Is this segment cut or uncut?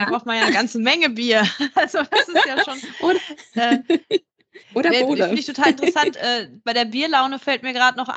cut